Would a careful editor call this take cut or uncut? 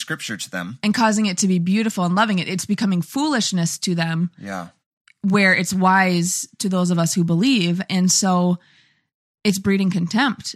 uncut